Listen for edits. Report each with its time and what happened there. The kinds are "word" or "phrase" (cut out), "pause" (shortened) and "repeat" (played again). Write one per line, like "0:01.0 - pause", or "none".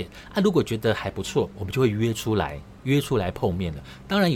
0:02.8 - pause